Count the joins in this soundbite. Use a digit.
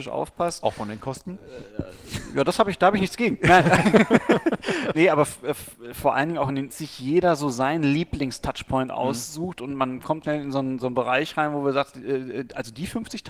3